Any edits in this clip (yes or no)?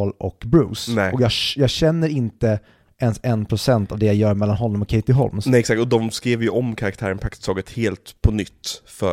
no